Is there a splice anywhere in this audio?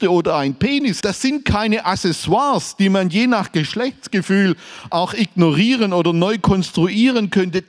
yes; 1 cut; at 1.0 s

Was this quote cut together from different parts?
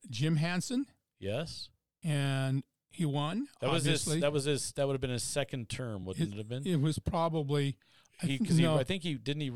no; 0 cuts

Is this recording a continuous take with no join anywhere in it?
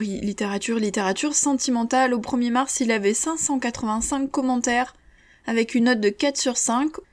yes; 0 cuts

